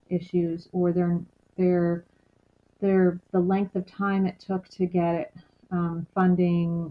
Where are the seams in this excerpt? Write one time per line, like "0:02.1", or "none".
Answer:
none

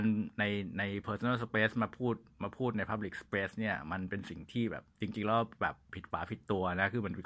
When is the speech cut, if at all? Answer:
none

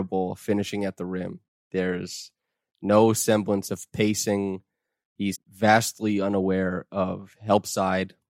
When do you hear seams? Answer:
0:05.3

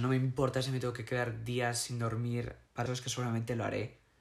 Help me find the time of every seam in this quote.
0:02.9

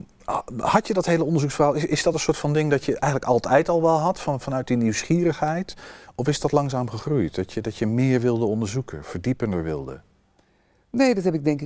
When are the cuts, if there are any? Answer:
none

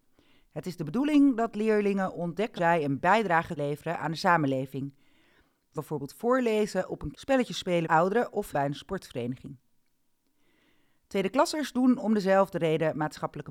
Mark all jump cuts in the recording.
0:02.6
0:03.6
0:05.8
0:07.1
0:07.8
0:08.5

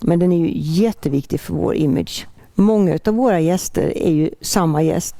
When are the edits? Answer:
none

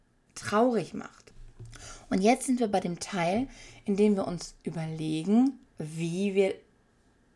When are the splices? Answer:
none

